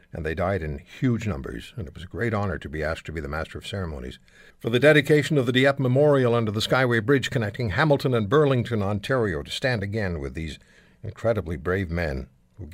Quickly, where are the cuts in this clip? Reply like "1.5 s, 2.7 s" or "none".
4.5 s